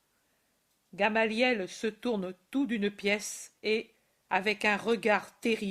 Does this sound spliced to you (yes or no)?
yes